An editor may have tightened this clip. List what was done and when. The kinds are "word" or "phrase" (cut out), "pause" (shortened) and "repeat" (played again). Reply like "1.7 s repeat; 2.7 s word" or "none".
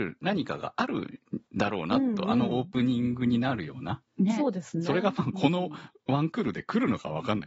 4.1 s pause